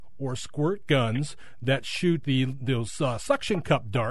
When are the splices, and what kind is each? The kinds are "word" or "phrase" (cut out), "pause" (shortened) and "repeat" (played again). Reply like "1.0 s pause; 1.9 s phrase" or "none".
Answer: 2.2 s word